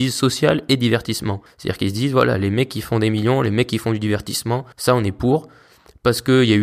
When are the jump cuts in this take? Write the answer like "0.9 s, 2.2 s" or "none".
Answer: 1.5 s, 4.7 s